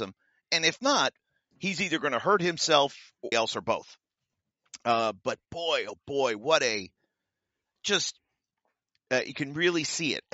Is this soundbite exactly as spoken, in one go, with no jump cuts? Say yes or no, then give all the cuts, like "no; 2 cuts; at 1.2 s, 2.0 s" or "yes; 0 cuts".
no; 1 cut; at 3.3 s